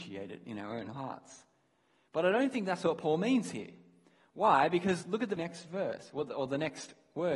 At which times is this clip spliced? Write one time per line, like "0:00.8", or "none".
0:05.4